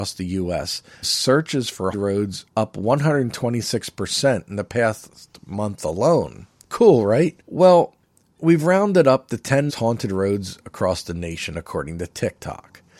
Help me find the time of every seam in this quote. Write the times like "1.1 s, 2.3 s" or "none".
1.0 s, 1.9 s, 2.5 s, 6.6 s, 7.4 s, 9.7 s